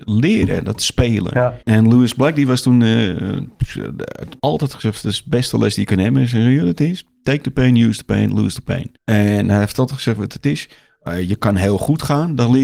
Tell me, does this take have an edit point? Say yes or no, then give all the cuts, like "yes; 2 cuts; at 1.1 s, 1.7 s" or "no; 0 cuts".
yes; 3 cuts; at 1.6 s, 4.4 s, 9.0 s